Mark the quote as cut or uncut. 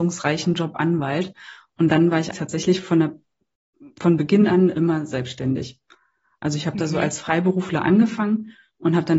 cut